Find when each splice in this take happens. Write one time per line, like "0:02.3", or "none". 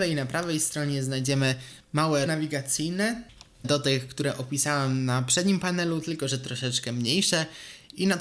0:02.3
0:03.6